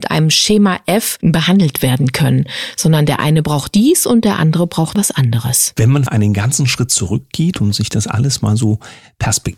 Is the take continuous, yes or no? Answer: no